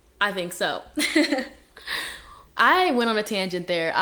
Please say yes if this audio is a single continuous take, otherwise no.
no